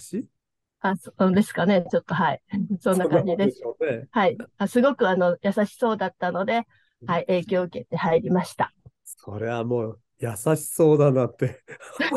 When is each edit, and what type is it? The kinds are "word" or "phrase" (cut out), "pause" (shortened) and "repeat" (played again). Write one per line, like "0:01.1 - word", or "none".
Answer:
none